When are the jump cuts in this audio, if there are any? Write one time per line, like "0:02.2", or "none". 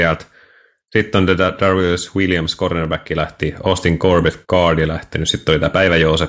0:04.4